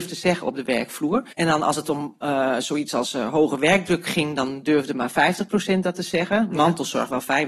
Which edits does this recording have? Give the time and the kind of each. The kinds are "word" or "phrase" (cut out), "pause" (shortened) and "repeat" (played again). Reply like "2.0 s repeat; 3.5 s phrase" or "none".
1.3 s pause